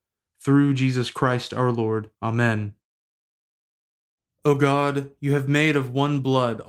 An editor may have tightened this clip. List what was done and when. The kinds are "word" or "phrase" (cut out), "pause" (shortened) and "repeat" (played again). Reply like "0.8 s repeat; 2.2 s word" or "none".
2.1 s pause